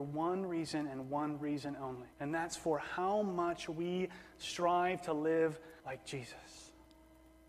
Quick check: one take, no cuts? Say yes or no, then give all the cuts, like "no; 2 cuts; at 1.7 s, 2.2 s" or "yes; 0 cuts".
no; 2 cuts; at 2.1 s, 5.8 s